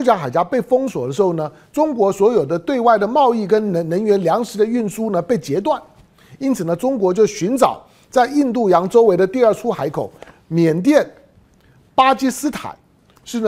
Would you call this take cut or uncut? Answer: uncut